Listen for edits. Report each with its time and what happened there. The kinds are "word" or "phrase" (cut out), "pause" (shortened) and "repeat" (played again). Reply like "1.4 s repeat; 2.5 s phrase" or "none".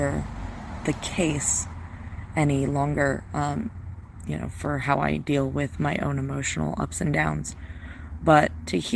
none